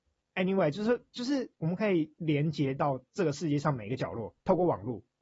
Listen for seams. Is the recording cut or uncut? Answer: cut